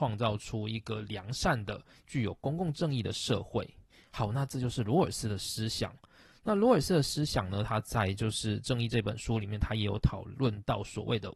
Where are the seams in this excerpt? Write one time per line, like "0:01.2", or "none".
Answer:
none